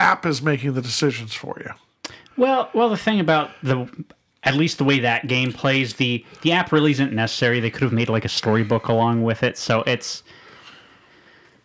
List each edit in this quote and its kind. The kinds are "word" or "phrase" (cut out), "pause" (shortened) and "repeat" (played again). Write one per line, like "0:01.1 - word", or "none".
none